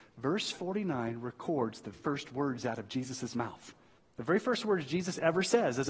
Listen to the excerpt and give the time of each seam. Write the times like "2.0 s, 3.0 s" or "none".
1.9 s, 4.0 s